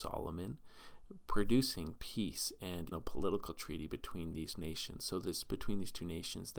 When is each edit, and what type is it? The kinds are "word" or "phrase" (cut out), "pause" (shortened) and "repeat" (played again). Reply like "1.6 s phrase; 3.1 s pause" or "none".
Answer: 2.9 s word; 5.5 s word